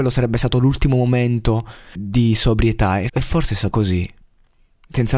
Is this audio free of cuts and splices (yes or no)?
no